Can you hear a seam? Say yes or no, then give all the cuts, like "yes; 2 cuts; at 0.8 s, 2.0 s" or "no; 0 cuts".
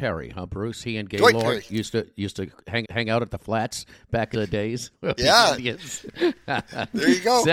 yes; 3 cuts; at 2.8 s, 4.3 s, 5.2 s